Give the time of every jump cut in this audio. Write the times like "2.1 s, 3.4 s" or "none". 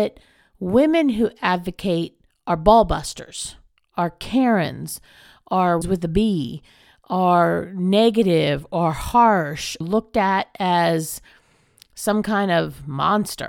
5.8 s, 9.8 s